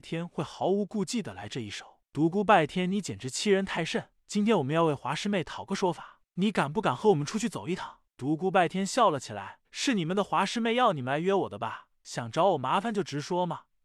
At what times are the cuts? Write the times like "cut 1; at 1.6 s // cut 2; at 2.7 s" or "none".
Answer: cut 1; at 9.6 s